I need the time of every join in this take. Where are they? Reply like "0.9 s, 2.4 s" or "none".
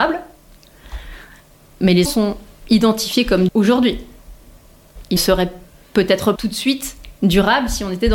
2.0 s, 3.5 s, 5.2 s, 6.4 s